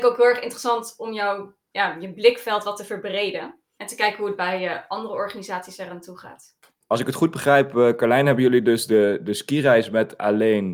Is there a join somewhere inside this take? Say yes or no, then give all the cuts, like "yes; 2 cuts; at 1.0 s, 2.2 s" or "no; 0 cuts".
no; 0 cuts